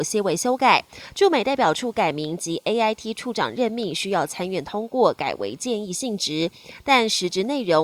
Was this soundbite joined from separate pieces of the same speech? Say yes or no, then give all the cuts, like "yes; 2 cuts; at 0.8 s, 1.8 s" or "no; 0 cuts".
no; 0 cuts